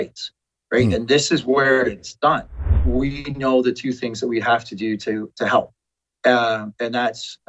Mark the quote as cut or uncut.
uncut